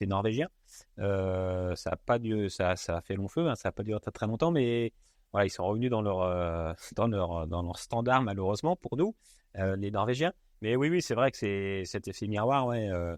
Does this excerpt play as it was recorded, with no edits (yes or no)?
yes